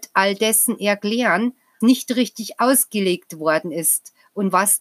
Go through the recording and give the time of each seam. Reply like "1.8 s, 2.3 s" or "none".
1.8 s

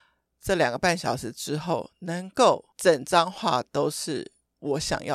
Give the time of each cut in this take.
2.7 s

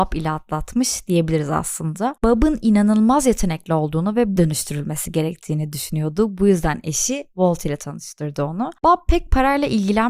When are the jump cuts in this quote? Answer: 4.4 s

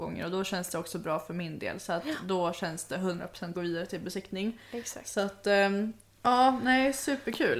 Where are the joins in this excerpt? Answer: 3.5 s

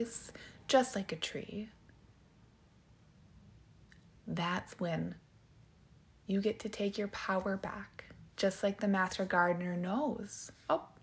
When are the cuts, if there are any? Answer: 8.3 s

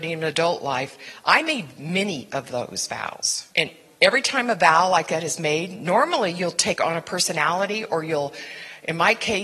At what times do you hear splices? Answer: 3.5 s

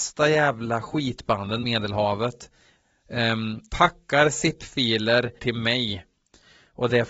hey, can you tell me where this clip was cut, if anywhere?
1.6 s, 3.7 s, 5.4 s

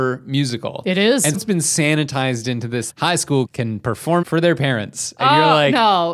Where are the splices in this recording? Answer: 1.3 s, 2.9 s, 3.5 s, 4.2 s

